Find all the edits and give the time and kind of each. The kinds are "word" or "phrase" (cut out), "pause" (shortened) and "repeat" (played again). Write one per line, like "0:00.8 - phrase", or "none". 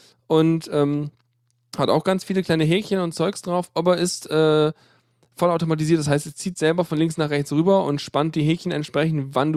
none